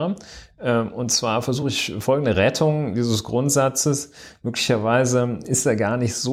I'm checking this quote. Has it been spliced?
no; 0 cuts

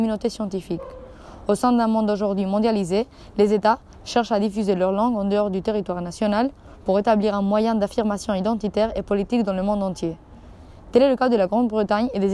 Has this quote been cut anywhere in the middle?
no; 0 cuts

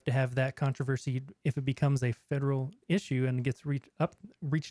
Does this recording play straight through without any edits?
no; 1 cut; at 2.8 s

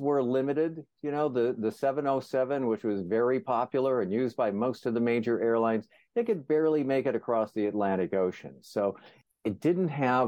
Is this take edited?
no; 0 cuts

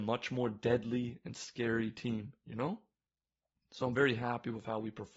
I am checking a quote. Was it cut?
no; 0 cuts

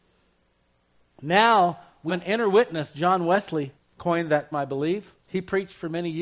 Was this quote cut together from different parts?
yes; 4 cuts; at 2.1 s, 3.8 s, 4.5 s, 5.2 s

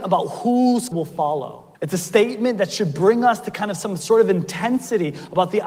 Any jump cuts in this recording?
yes; 2 cuts; at 0.9 s, 1.7 s

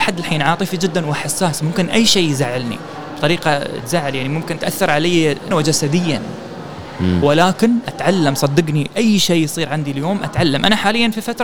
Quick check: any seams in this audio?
yes; 4 cuts; at 3.8 s, 4.6 s, 5.5 s, 7.8 s

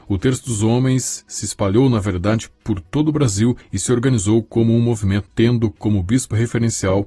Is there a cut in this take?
yes; 1 cut; at 5.3 s

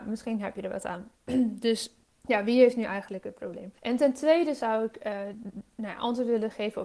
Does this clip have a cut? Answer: yes; 3 cuts; at 1.2 s, 2.0 s, 3.8 s

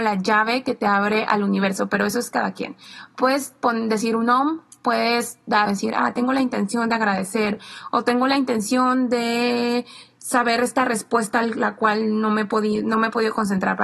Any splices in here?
yes; 1 cut; at 5.7 s

